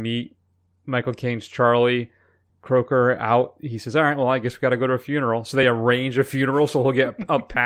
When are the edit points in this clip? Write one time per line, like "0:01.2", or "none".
none